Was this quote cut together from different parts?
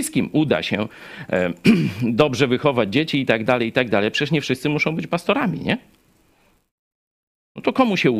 no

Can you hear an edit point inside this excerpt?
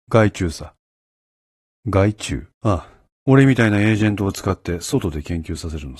yes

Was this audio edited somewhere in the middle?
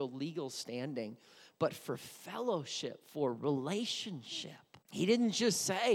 yes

